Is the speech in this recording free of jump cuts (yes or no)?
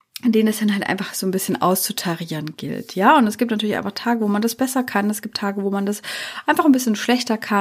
yes